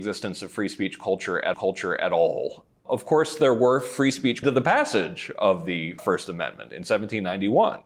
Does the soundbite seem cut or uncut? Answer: cut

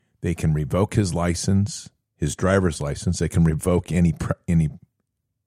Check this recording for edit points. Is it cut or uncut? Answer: uncut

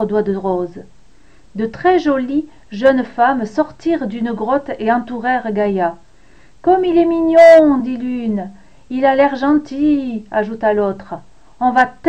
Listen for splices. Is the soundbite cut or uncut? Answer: uncut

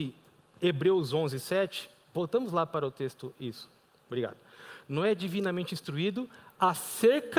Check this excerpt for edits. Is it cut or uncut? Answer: uncut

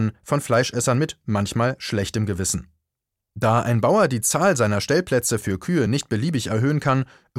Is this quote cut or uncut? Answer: uncut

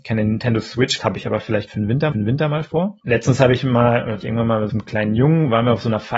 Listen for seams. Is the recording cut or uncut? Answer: cut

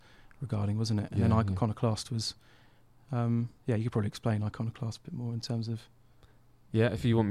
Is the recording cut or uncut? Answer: cut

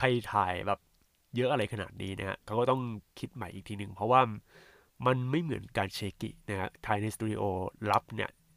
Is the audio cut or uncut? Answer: uncut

